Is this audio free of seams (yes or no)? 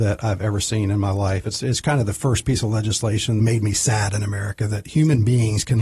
no